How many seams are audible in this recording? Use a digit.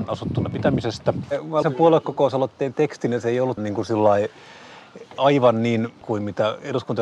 4